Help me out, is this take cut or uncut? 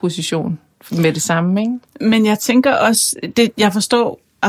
cut